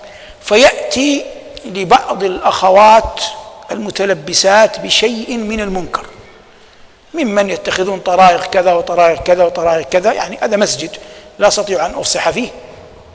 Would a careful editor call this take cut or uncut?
uncut